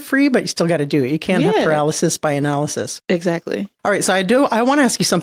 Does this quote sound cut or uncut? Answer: uncut